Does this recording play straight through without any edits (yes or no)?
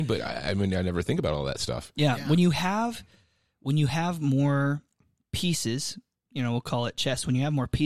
yes